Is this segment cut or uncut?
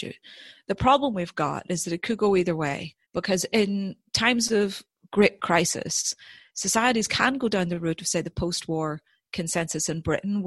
cut